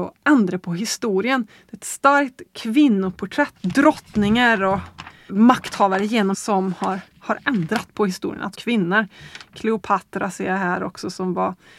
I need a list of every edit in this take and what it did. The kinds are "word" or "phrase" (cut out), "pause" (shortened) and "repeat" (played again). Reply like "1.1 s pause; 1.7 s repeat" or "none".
3.6 s phrase; 5.3 s word; 6.3 s word; 7.1 s pause; 8.5 s word